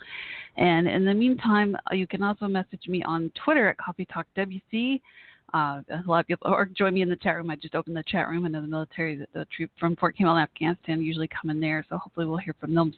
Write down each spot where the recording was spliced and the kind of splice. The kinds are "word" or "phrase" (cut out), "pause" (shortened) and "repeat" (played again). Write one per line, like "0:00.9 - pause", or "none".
none